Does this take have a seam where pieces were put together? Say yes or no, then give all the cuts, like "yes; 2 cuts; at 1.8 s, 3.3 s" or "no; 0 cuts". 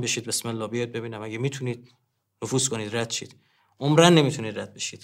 no; 0 cuts